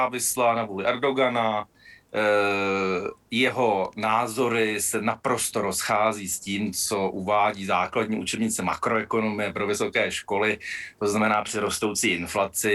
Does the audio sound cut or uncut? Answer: uncut